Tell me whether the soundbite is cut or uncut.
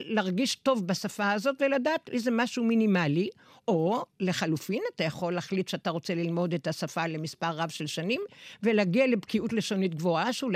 uncut